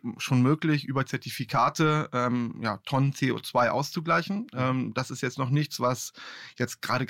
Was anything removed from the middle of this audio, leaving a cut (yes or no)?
no